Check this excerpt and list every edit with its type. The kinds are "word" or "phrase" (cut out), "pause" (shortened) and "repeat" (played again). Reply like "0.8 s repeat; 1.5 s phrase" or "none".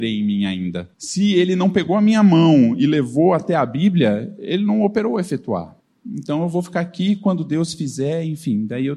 0.9 s pause; 5.8 s pause